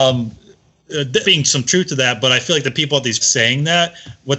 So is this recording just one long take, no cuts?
no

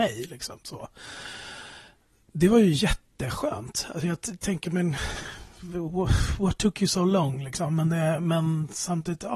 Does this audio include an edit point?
no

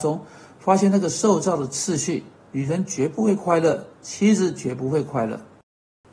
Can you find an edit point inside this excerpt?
yes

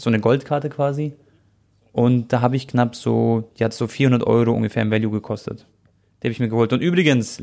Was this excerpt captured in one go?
yes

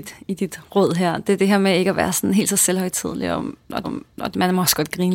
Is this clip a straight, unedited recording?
no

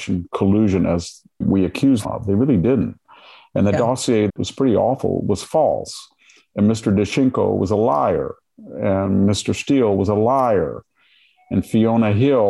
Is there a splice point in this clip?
yes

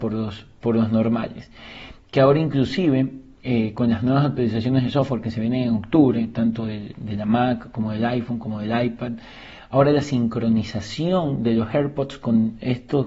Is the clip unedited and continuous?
yes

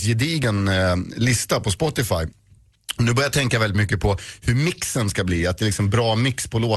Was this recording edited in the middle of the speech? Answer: no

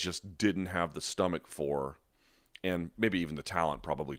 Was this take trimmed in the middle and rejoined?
no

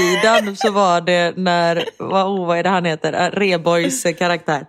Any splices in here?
no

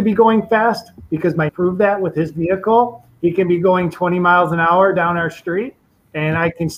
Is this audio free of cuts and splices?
no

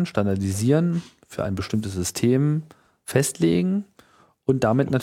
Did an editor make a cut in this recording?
no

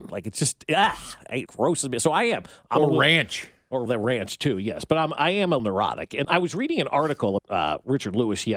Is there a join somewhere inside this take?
yes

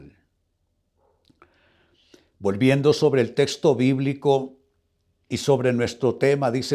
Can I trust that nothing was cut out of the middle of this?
yes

